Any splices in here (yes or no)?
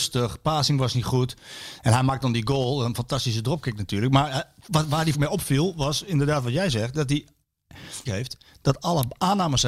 yes